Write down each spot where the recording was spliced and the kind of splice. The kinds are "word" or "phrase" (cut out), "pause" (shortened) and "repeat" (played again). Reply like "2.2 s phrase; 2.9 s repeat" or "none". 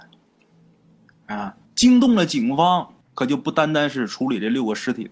1.6 s pause; 3.0 s pause